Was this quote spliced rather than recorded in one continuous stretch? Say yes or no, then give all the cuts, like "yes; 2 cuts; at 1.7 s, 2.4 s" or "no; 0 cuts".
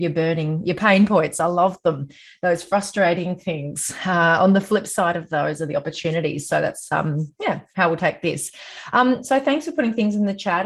no; 0 cuts